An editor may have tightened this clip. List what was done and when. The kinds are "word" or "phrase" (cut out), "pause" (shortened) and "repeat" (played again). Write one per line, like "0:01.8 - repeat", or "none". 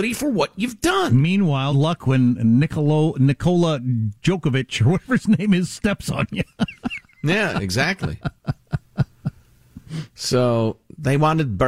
0:01.7 - word